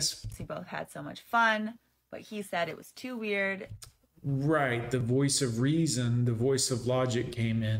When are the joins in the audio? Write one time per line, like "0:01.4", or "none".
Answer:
none